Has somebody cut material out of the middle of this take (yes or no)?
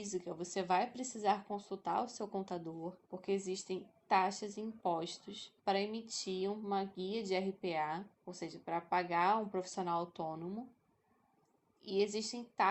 yes